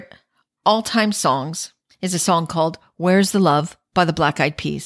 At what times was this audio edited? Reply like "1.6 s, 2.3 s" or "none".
1.9 s